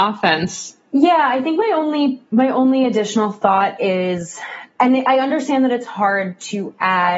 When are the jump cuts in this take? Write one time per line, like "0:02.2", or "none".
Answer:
0:02.3